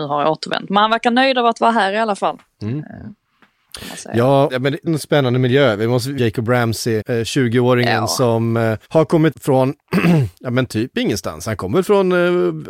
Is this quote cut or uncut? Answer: cut